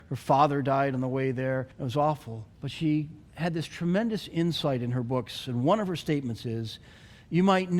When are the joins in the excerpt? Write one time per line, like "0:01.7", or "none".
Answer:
0:01.7
0:02.5
0:03.3